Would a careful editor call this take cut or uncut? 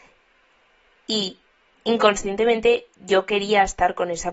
uncut